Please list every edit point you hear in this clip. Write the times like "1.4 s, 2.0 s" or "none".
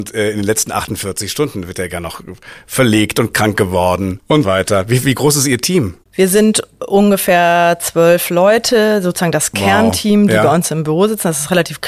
4.4 s, 6.0 s